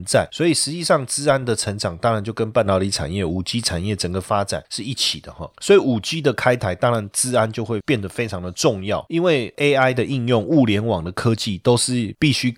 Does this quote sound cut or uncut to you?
uncut